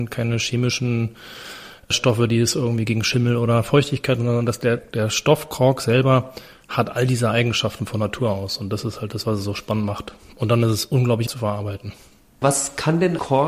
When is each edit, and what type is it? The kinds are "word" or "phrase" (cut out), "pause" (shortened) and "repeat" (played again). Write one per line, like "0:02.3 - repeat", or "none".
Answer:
0:04.8 - word
0:11.3 - word